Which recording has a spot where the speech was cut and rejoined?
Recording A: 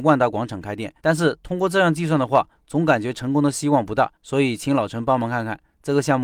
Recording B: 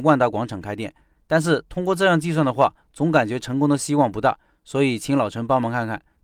A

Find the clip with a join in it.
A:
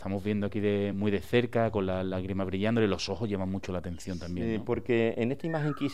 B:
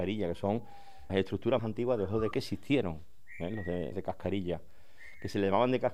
B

